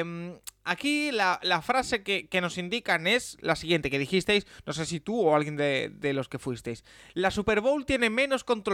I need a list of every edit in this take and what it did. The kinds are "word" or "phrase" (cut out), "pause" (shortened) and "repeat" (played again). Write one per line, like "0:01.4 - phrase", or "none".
none